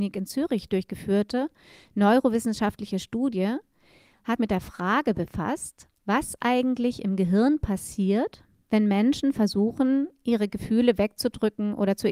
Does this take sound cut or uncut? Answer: cut